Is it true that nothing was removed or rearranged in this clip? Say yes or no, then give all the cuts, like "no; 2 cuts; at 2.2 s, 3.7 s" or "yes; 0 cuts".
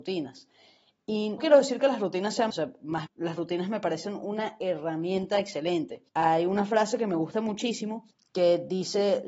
no; 5 cuts; at 1.4 s, 2.5 s, 3.1 s, 6.1 s, 8.1 s